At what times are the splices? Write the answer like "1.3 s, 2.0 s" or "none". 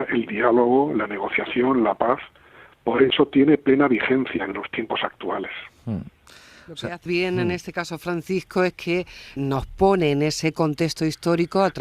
7.1 s, 9.4 s